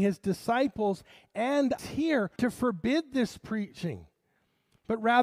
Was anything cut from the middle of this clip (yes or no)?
yes